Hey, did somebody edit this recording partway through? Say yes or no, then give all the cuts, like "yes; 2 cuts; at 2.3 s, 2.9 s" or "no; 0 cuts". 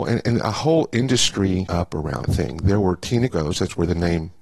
yes; 3 cuts; at 1.7 s, 2.2 s, 3.3 s